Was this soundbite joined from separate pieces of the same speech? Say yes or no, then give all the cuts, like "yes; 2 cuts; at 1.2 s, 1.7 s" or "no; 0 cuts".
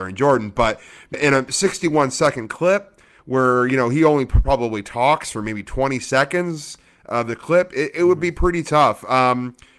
yes; 1 cut; at 1.1 s